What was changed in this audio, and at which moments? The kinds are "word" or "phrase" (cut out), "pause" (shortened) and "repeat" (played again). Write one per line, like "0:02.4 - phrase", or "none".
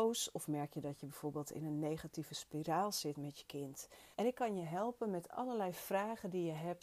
0:04.1 - pause